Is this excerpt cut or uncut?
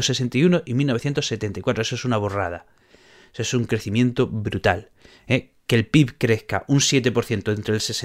uncut